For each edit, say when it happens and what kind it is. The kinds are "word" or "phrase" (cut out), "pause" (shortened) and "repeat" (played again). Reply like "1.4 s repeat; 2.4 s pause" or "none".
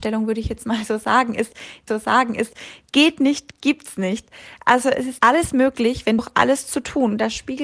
1.9 s repeat; 5.2 s word; 6.2 s phrase